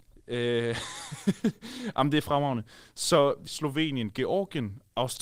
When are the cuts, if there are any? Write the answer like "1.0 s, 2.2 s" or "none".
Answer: 3.5 s